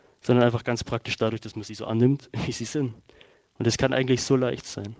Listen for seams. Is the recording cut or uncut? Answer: uncut